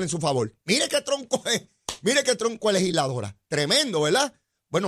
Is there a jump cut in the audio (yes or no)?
no